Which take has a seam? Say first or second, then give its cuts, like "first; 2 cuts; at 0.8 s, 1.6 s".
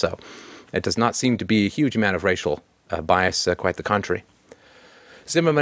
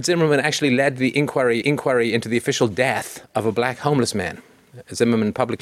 second; 2 cuts; at 1.6 s, 3.2 s